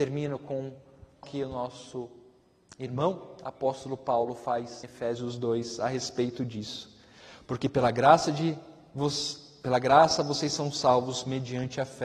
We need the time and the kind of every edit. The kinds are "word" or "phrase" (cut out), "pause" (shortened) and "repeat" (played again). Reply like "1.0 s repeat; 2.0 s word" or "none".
1.2 s word; 4.8 s word